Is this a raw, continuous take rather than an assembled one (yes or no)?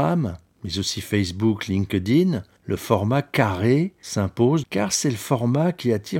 no